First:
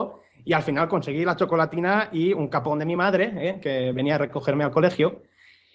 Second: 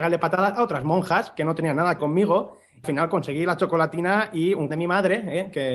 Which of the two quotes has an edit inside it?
second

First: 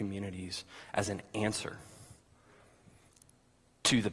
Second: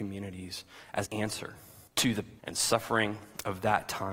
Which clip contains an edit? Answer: second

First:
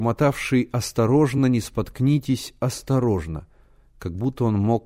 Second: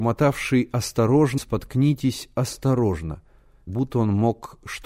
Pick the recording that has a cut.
second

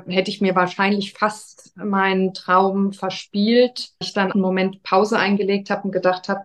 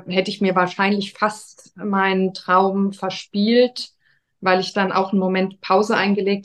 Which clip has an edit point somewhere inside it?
first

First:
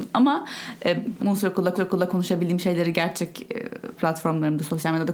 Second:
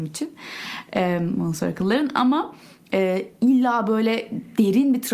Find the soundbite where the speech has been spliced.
first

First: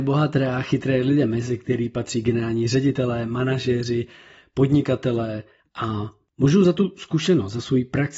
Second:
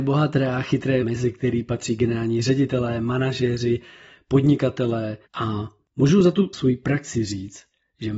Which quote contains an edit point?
second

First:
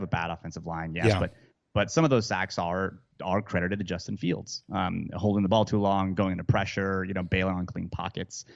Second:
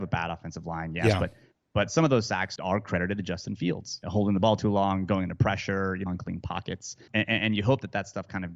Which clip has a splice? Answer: second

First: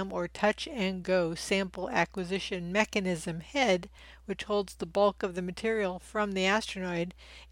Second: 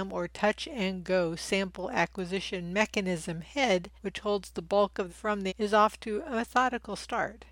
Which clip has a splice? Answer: second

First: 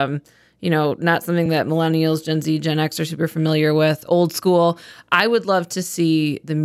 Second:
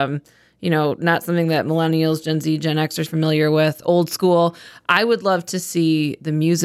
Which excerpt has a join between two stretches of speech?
second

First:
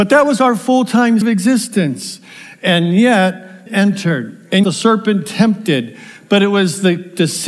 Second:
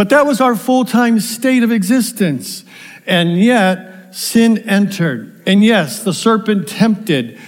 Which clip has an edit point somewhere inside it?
first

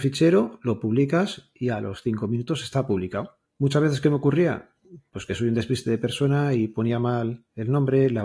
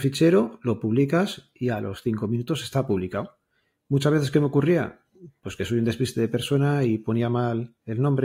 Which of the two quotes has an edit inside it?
first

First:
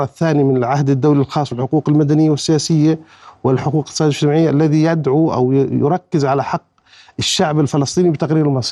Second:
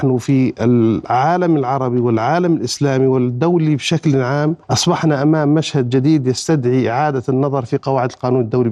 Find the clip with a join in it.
second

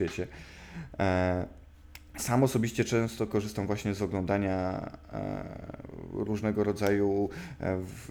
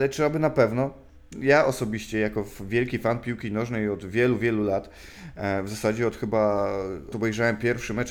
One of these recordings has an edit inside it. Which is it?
second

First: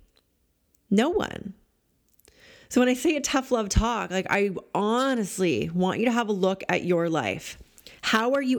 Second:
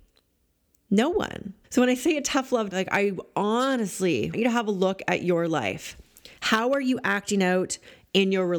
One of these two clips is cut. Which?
second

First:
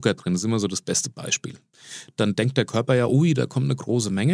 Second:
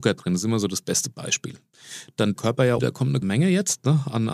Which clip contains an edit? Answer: second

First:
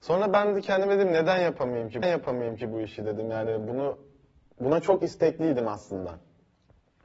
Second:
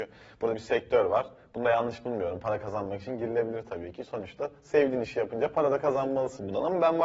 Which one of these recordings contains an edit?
first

